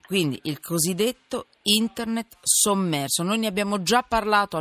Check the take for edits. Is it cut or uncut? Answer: uncut